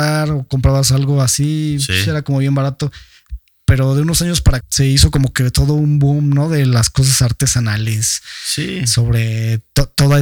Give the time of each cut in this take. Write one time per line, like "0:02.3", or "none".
0:04.6